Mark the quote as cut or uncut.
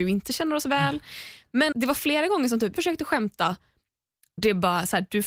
cut